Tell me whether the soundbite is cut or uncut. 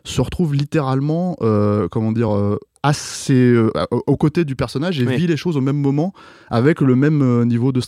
uncut